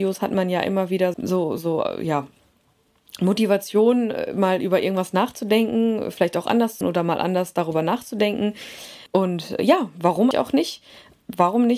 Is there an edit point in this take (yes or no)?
yes